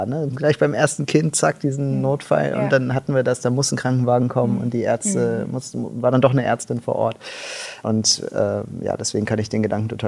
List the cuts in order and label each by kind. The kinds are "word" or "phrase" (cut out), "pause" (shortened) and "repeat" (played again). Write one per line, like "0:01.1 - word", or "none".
0:07.8 - word